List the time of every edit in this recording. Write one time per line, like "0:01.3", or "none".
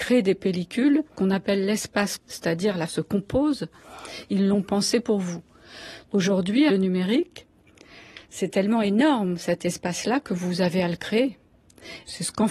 0:01.2
0:02.2
0:02.9
0:06.7
0:08.2

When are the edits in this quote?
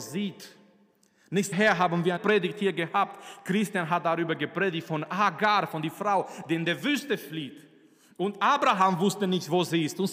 0:01.5
0:02.2

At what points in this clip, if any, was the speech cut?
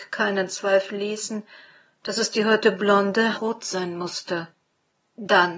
0:03.3

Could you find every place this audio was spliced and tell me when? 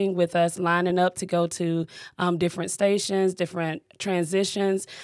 none

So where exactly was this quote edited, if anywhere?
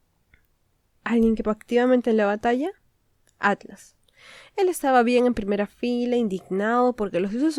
0:01.4

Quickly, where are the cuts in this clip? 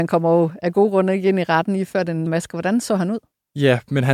0:02.3

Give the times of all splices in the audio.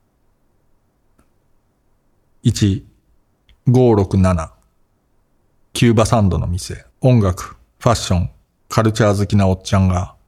0:06.9

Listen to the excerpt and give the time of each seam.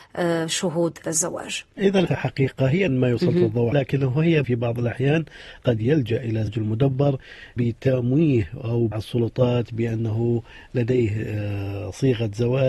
0:01.0
0:02.1
0:02.9
0:03.7
0:04.4
0:05.6
0:06.5
0:07.6
0:08.9

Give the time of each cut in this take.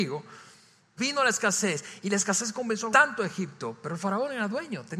0:01.0
0:02.9

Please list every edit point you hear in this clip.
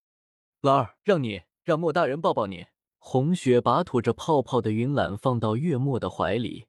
0:01.0
0:02.9

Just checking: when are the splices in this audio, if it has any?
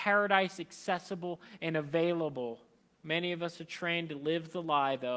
0:02.8

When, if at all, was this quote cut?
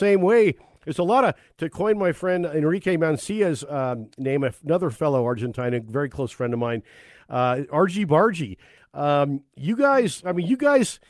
none

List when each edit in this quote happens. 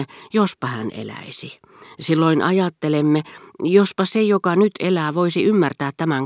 none

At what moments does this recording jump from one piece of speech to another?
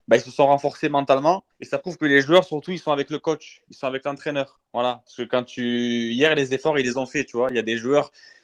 0:01.5

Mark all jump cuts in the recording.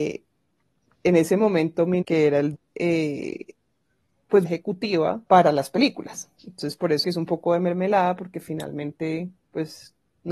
0:02.0
0:02.5
0:04.4
0:05.3
0:06.4
0:07.0

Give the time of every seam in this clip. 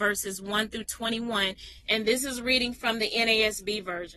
none

